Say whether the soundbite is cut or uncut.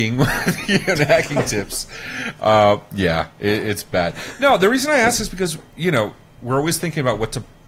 uncut